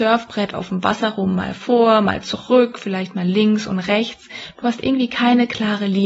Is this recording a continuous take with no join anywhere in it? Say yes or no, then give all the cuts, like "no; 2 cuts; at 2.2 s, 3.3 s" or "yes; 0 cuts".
yes; 0 cuts